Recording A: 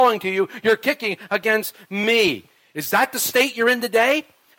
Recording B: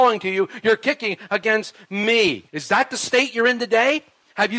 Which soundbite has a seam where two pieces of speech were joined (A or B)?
B